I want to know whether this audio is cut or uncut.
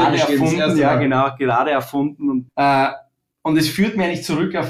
cut